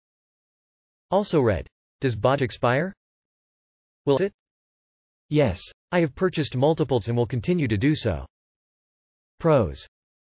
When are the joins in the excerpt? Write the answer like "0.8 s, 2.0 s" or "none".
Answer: 2.4 s, 4.2 s, 7.0 s